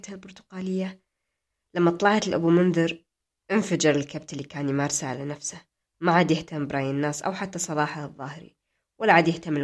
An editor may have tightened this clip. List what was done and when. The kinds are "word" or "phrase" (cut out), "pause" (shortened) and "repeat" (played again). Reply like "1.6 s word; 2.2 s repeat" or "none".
none